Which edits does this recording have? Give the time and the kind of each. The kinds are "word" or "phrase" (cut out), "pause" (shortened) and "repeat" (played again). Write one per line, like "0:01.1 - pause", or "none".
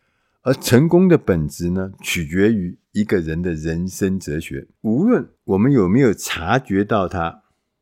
0:04.8 - pause
0:05.3 - pause